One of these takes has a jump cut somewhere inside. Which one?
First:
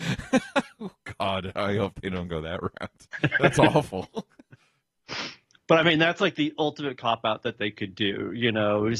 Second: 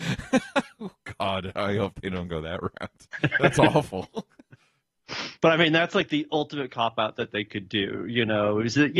second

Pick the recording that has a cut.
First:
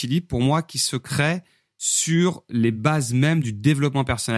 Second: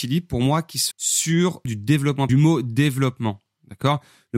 second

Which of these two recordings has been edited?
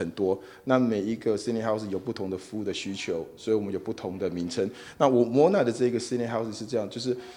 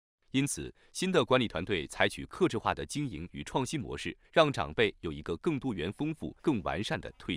second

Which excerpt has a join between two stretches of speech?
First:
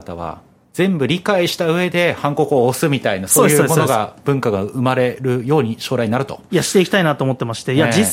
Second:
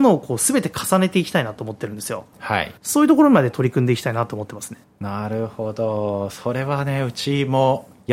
second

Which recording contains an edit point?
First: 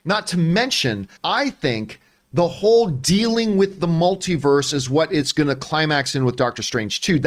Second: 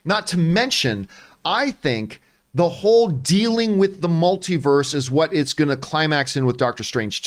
first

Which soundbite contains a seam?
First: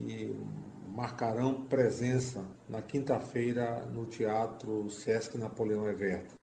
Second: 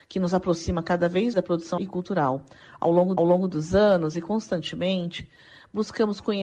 second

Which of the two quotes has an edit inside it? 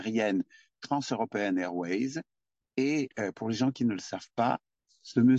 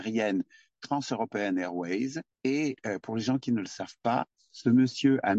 second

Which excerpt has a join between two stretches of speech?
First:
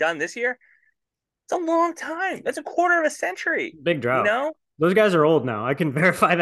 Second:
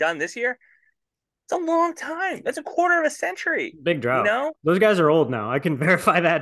second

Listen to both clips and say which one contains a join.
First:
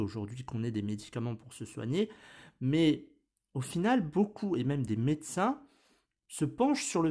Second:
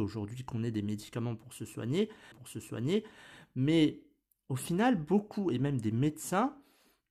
second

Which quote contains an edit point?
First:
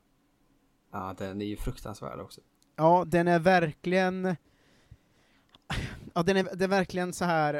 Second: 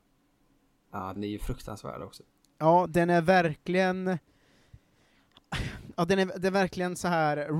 second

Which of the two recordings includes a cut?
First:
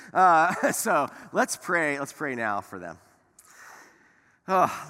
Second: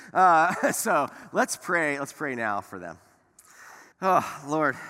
second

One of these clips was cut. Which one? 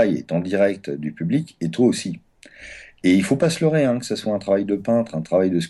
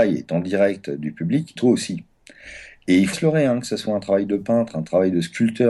second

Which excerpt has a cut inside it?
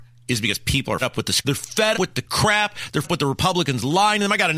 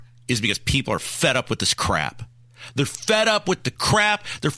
first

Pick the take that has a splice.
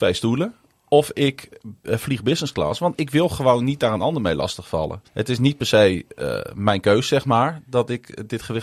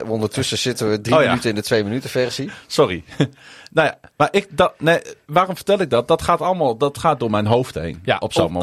first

